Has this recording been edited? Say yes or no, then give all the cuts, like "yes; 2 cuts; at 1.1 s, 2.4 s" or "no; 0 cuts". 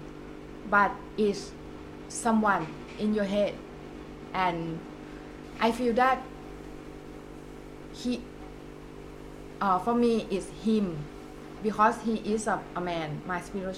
no; 0 cuts